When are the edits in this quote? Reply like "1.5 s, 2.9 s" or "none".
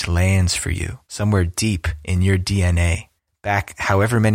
1.0 s, 3.2 s